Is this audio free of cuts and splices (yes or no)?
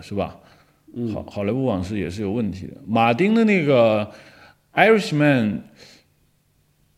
yes